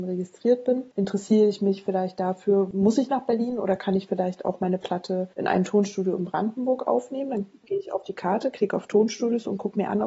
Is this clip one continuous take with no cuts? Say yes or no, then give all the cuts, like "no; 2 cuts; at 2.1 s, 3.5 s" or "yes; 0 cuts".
no; 1 cut; at 0.9 s